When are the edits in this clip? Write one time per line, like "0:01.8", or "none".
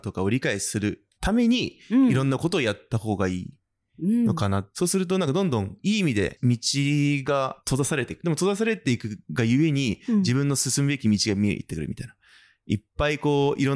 0:01.2
0:09.2